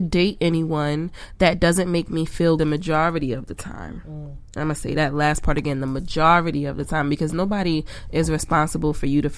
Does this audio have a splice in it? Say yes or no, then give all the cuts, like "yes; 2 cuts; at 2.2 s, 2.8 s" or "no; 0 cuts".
yes; 1 cut; at 2.6 s